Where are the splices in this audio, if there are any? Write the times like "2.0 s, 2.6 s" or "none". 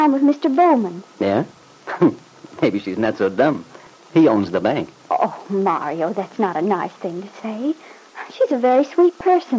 none